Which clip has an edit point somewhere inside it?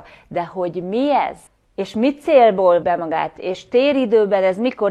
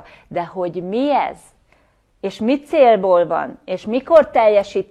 first; 2 cuts; at 1.5 s, 2.8 s

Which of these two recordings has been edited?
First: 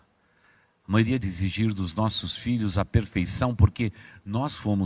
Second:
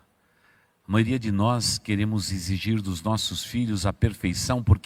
first; 1 cut; at 1.2 s

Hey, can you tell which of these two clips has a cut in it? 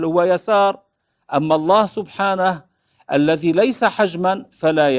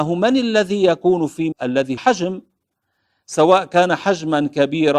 second; 2 cuts; at 1.5 s, 2.0 s

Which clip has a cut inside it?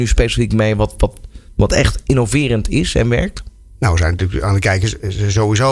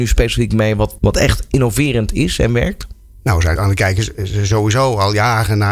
second; 2 cuts; at 1.0 s, 3.6 s

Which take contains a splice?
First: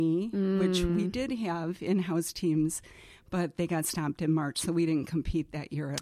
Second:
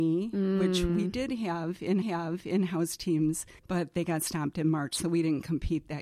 second; 2 cuts; at 2.0 s, 3.6 s

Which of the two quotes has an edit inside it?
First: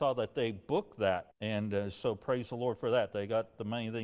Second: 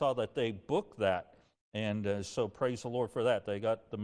first; 1 cut; at 1.3 s

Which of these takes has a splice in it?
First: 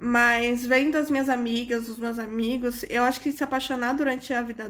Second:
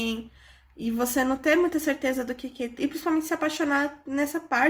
second; 1 cut; at 2.8 s

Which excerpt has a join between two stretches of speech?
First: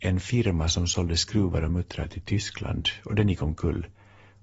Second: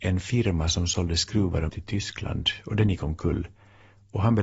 second; 1 cut; at 1.7 s

